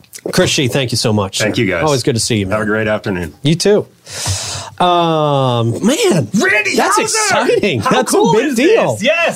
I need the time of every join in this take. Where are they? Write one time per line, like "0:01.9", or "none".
none